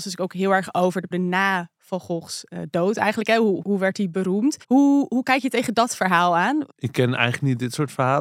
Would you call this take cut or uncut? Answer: cut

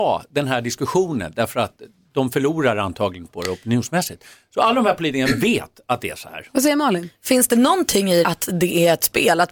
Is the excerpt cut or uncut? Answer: cut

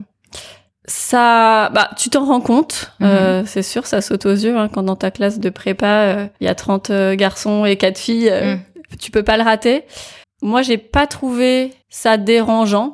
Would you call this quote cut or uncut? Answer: cut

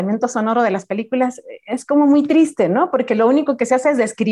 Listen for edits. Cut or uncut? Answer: uncut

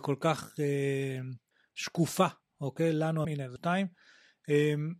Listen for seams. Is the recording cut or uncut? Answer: cut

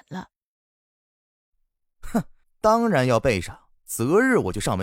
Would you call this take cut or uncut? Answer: cut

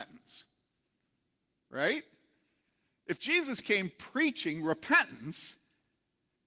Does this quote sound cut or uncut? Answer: uncut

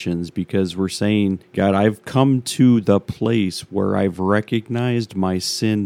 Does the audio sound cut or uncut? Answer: uncut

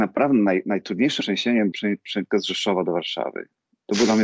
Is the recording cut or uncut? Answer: cut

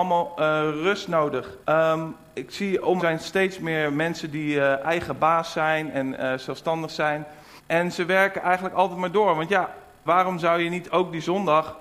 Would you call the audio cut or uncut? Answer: cut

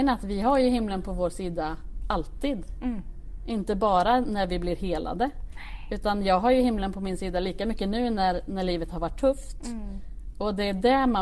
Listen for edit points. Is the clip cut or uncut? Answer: uncut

